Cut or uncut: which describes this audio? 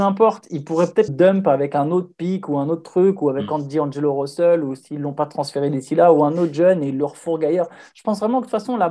cut